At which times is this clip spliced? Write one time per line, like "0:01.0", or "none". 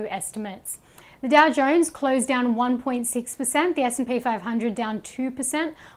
none